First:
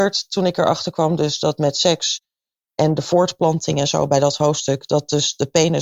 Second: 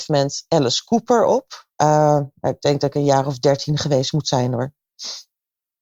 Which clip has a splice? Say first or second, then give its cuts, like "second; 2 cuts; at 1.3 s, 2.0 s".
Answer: second; 1 cut; at 1.7 s